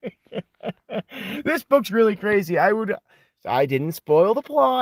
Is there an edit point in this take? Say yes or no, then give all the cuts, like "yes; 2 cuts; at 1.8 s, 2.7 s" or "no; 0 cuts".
no; 0 cuts